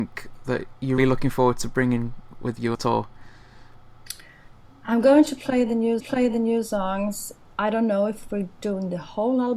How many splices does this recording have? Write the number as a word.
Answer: three